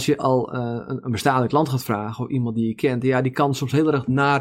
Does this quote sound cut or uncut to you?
uncut